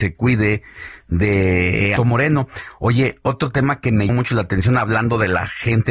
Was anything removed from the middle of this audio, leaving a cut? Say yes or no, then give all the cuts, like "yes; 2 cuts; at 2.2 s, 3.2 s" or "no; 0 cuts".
yes; 2 cuts; at 2.0 s, 4.1 s